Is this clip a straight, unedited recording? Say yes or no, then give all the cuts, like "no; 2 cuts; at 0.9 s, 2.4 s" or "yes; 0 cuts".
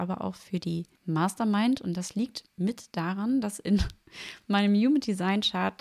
no; 1 cut; at 0.9 s